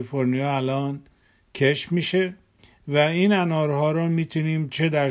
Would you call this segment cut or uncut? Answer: uncut